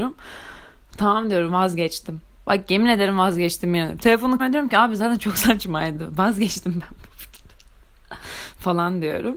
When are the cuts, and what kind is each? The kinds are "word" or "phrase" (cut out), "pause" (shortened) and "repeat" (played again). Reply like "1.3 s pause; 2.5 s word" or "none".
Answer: 2.4 s pause; 4.4 s word